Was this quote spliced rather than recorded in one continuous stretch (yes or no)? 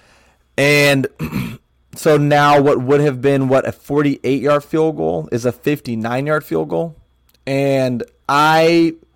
no